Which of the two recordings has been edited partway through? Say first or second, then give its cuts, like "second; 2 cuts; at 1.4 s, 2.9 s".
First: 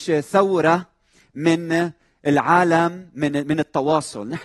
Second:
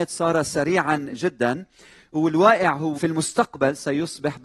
second; 2 cuts; at 1.1 s, 2.9 s